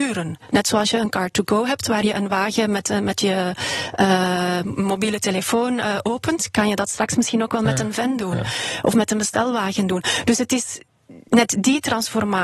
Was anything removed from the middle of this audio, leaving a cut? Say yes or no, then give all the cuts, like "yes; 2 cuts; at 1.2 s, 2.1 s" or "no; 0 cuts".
no; 0 cuts